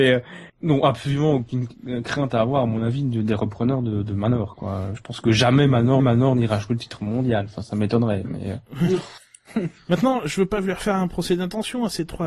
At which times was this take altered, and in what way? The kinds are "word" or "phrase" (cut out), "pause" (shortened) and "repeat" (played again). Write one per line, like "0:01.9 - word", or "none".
0:06.0 - repeat

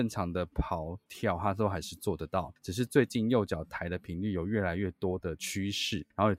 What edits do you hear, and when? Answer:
0:01.1 - word

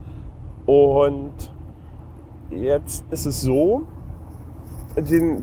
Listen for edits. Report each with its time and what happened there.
0:03.1 - word

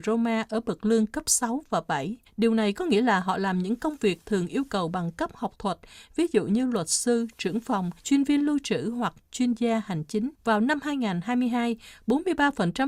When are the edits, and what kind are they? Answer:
0:02.3 - pause
0:08.0 - pause
0:10.3 - pause

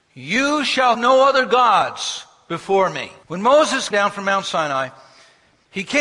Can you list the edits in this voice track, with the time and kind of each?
0:00.9 - word
0:03.2 - pause
0:03.9 - word

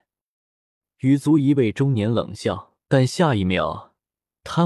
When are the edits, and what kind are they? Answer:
0:02.8 - pause

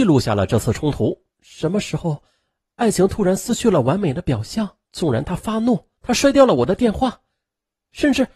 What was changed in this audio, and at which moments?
0:01.3 - pause
0:04.8 - pause
0:06.0 - pause

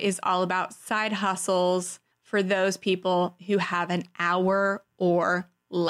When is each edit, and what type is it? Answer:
0:02.1 - pause

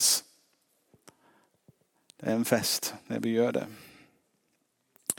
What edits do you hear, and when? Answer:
none

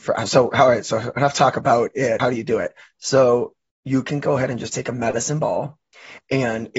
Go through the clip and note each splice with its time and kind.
0:02.2 - word

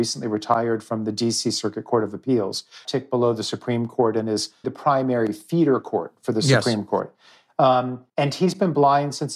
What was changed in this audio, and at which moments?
0:02.8 - phrase
0:04.6 - word
0:08.1 - pause

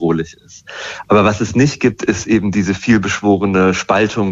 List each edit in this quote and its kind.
none

